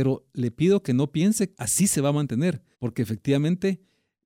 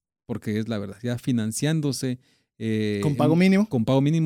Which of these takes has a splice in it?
first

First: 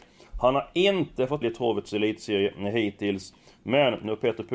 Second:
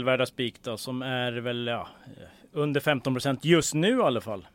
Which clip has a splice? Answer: first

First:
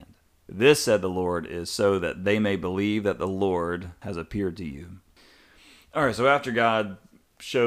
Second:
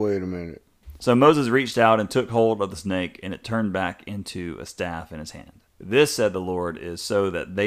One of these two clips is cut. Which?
second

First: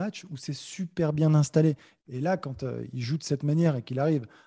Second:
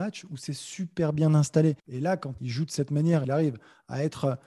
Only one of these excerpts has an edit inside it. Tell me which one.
second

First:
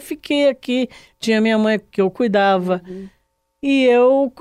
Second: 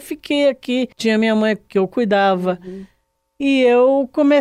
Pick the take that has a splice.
second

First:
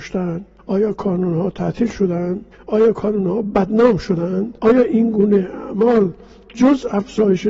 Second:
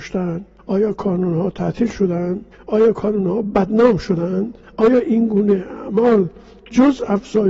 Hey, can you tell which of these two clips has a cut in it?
first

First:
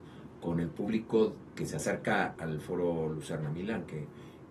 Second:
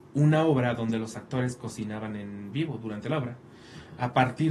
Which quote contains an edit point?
first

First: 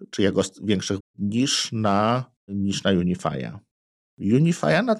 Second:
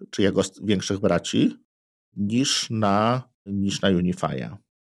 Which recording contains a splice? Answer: first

